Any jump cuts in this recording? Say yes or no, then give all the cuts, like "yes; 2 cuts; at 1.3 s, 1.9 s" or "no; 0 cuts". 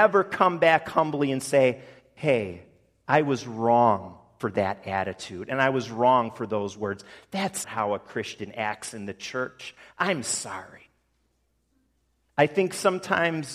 yes; 1 cut; at 7.6 s